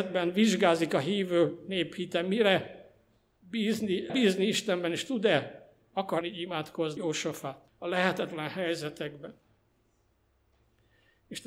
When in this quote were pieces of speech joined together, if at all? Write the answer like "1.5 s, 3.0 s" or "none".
4.1 s, 6.2 s, 7.0 s, 7.7 s